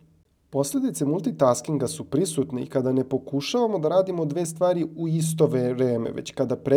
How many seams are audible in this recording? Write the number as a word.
zero